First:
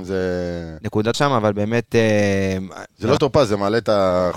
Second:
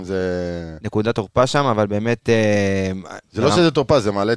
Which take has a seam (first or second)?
first